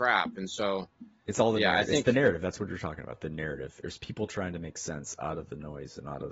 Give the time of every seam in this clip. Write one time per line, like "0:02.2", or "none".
none